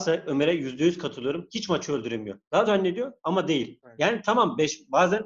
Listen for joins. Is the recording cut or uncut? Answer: cut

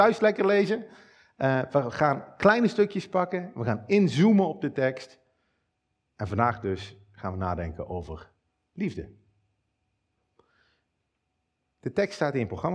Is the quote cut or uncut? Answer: uncut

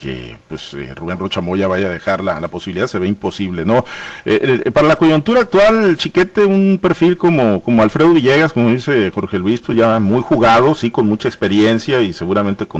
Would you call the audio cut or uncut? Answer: uncut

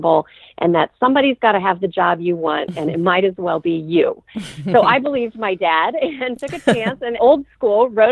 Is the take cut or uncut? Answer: cut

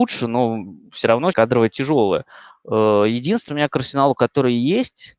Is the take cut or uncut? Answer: cut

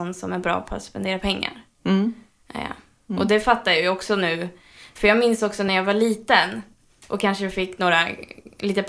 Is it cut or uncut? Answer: uncut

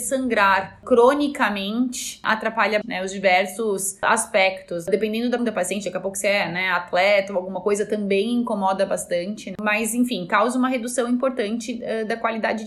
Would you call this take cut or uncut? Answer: cut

